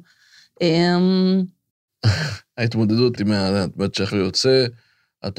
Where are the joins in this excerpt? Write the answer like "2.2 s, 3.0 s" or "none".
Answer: 3.2 s, 4.1 s